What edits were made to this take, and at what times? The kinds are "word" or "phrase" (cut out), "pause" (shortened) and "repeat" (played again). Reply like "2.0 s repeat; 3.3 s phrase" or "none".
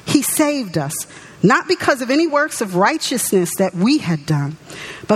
none